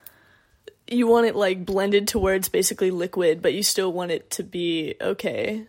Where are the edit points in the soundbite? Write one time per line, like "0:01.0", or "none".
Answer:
none

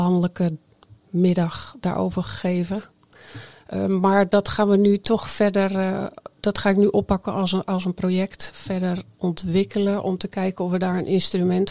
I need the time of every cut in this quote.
none

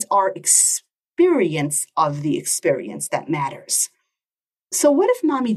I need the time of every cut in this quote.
none

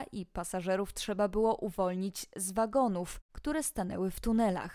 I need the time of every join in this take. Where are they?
none

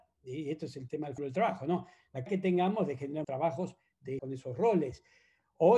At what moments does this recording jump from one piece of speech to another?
0:01.2
0:02.3
0:03.2
0:04.2

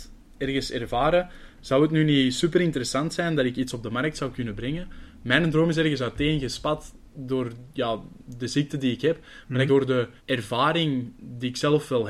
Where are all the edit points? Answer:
0:09.7
0:10.2

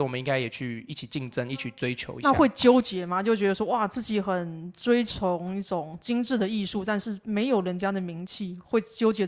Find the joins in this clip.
none

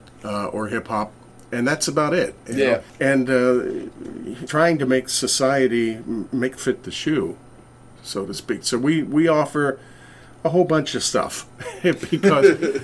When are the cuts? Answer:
0:02.9
0:04.5
0:06.6

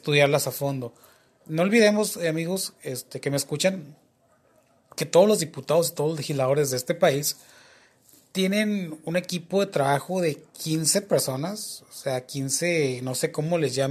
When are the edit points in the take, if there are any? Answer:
none

